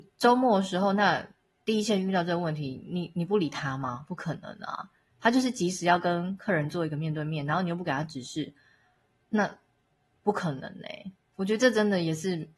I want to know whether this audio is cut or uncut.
uncut